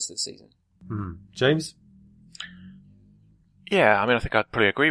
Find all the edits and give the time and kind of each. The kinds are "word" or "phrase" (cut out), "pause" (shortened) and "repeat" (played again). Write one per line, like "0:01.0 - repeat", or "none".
none